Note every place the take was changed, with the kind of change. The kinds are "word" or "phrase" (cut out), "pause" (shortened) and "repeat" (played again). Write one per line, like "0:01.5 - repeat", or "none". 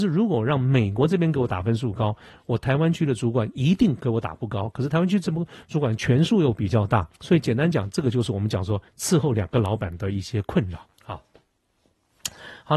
0:07.1 - pause
0:08.9 - pause
0:10.9 - pause